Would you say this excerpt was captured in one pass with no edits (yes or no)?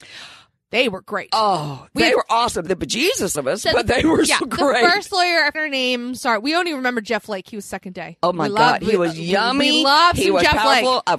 no